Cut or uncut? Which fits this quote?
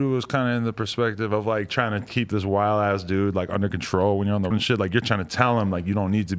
cut